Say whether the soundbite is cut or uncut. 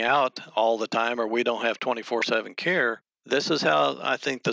uncut